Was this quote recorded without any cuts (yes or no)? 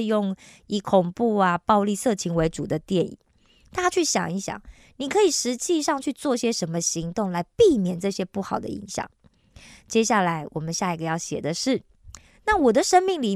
yes